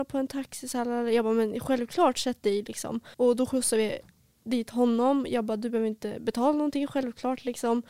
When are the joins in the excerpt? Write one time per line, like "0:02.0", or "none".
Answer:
0:03.1